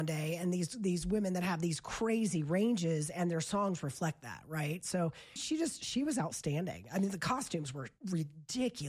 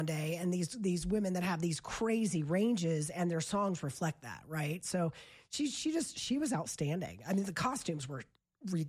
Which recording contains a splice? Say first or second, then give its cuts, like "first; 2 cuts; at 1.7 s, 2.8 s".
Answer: first; 2 cuts; at 5.4 s, 8.0 s